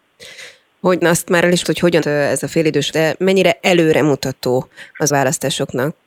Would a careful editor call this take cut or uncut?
cut